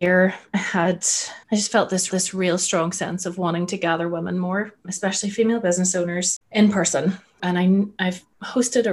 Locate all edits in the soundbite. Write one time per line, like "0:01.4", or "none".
0:01.4
0:02.1
0:04.8
0:06.4